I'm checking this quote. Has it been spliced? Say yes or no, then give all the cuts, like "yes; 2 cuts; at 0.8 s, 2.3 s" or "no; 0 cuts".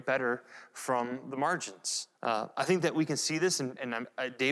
yes; 1 cut; at 2.1 s